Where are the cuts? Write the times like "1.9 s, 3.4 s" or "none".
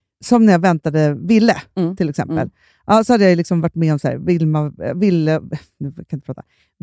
none